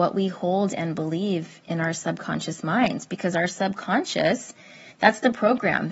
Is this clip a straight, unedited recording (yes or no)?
no